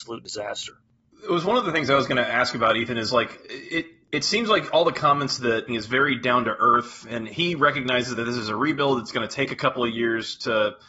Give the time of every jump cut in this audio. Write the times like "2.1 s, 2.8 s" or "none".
5.7 s